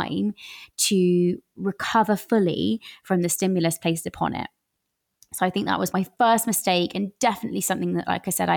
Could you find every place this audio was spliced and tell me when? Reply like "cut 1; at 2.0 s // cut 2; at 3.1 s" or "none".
cut 1; at 5.9 s